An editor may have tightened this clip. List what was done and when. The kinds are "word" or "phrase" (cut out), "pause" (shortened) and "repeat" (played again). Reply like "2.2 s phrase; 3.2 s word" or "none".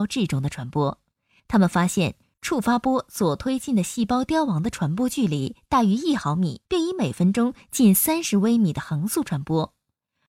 6.6 s pause

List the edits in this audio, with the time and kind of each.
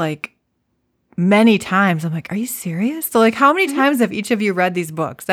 none

